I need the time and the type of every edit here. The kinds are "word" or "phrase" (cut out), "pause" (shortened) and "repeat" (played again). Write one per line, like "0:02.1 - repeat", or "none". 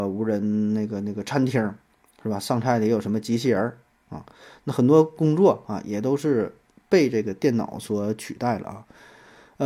none